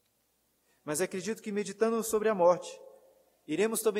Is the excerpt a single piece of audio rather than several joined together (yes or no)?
yes